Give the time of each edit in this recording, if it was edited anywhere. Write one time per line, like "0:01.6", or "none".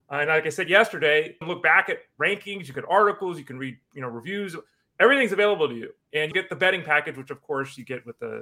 0:01.4
0:02.7
0:06.3